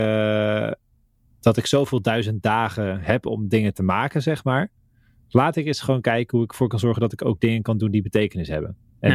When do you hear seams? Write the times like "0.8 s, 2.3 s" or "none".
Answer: none